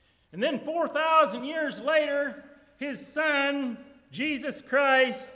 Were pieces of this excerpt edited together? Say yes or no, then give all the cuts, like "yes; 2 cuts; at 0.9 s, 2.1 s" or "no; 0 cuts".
no; 0 cuts